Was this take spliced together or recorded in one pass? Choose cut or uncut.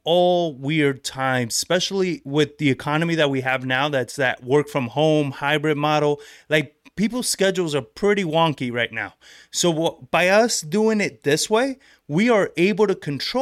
uncut